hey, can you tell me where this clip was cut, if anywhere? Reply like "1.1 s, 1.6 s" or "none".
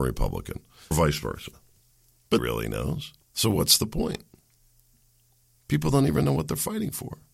0.9 s, 2.4 s, 3.2 s